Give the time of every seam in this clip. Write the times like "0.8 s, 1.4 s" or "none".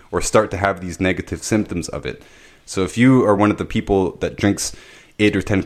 none